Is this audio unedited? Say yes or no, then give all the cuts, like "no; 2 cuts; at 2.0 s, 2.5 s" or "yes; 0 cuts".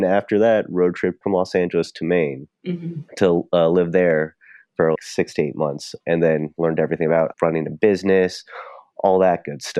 no; 5 cuts; at 1.2 s, 3.1 s, 5.0 s, 6.0 s, 7.3 s